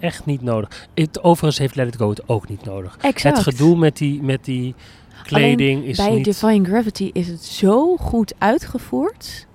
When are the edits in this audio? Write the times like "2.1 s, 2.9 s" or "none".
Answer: none